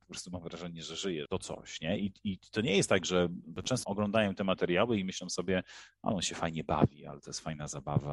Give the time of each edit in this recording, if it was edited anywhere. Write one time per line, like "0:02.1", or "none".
0:01.3
0:03.4
0:03.8